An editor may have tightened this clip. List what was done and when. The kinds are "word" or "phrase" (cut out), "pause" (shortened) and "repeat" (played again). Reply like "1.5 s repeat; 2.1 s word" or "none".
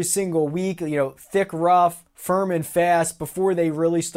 2.1 s pause